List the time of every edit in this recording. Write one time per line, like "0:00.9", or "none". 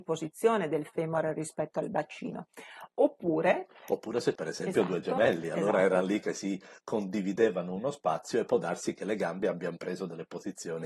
0:04.3